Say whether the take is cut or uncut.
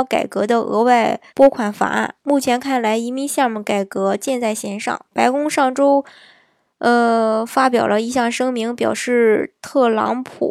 cut